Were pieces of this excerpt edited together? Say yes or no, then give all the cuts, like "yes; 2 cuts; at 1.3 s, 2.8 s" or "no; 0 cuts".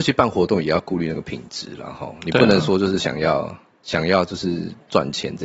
yes; 1 cut; at 3.7 s